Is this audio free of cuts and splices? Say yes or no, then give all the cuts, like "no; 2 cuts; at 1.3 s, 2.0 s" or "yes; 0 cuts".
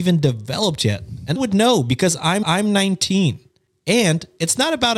no; 2 cuts; at 1.4 s, 2.4 s